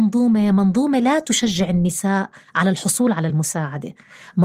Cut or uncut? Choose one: uncut